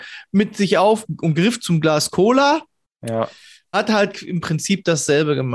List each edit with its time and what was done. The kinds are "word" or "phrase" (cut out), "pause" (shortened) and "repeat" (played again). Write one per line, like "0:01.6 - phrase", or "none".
0:03.7 - word